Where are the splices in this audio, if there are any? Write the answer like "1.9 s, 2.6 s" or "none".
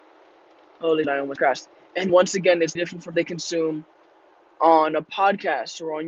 1.0 s, 1.4 s, 2.1 s, 2.8 s, 3.1 s